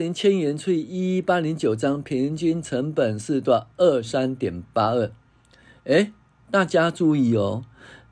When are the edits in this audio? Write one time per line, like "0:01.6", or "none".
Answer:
none